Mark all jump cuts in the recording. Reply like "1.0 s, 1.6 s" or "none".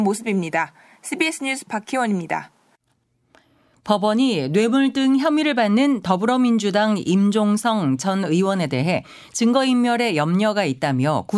none